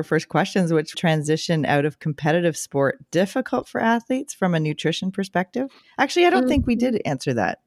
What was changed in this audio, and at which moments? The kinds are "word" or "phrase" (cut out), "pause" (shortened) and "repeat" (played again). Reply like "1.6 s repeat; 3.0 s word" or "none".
0.9 s phrase